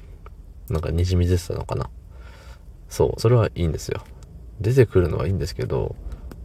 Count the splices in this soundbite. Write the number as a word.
one